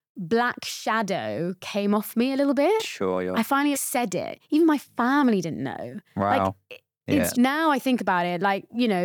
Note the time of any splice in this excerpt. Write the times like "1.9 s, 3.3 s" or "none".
3.7 s, 7.3 s